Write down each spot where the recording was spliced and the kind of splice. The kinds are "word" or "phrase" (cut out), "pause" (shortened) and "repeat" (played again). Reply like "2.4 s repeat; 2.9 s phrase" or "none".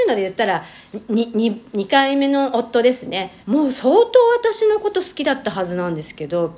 3.4 s pause